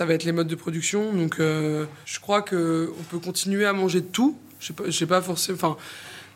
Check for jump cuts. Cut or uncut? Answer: uncut